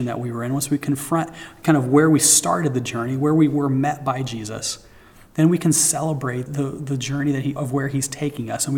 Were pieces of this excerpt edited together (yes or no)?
yes